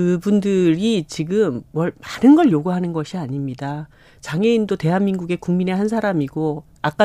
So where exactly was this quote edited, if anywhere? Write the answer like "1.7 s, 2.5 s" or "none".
none